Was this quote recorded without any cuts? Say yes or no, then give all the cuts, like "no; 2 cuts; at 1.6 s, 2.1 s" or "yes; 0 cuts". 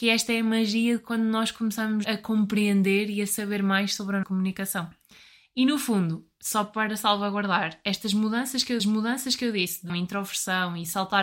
no; 4 cuts; at 2.0 s, 4.2 s, 8.8 s, 9.9 s